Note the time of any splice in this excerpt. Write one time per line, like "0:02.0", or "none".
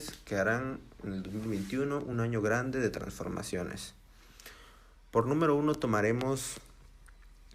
none